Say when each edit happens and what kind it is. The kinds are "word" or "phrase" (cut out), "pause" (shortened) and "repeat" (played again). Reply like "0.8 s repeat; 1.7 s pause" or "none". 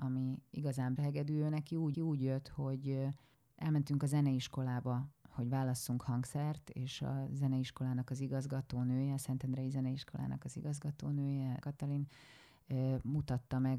1.0 s phrase; 1.9 s repeat; 3.3 s pause; 11.6 s word